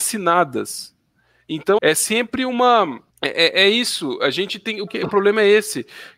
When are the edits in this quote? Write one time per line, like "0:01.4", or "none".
0:01.8
0:03.1
0:04.9